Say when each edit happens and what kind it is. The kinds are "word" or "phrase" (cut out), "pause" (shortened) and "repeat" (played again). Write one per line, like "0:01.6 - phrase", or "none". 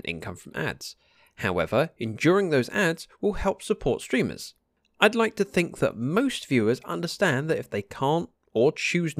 none